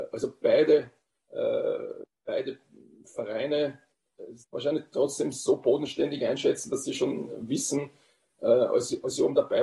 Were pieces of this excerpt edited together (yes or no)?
yes